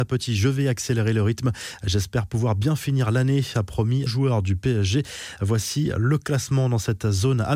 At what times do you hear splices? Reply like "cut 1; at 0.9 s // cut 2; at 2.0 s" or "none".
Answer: cut 1; at 4.1 s